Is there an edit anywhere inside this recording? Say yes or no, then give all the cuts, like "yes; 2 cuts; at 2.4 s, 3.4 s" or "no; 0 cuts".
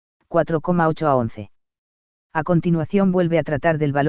no; 0 cuts